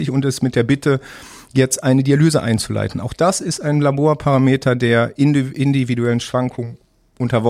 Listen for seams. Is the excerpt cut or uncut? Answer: uncut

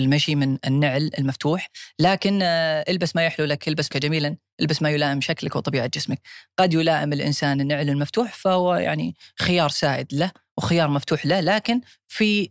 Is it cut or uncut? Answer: cut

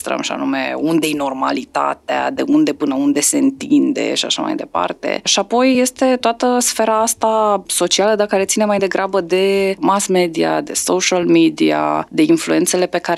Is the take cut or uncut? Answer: uncut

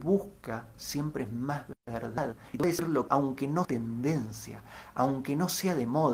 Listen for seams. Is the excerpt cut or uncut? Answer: cut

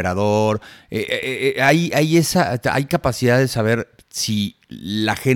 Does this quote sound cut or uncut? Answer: uncut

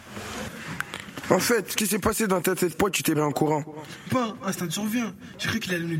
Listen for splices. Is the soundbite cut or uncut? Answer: cut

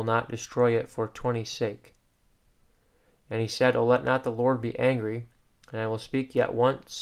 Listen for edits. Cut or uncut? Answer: uncut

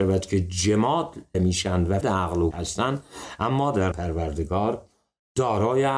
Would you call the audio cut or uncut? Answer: cut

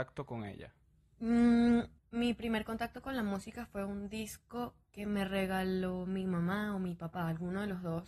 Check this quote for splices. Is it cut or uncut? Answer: cut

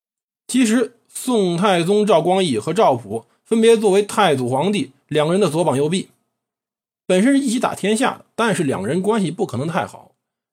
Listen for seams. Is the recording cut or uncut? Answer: uncut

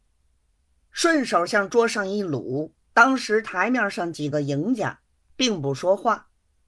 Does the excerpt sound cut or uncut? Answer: cut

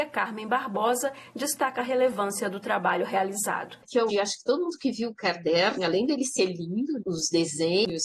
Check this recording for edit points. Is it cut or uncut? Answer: cut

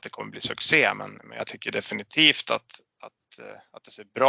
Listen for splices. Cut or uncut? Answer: uncut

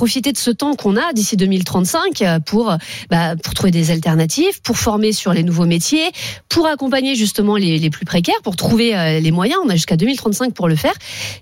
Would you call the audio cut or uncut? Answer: uncut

